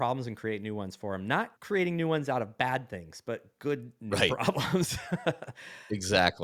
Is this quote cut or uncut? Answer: cut